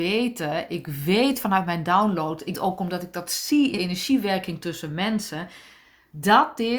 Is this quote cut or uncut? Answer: cut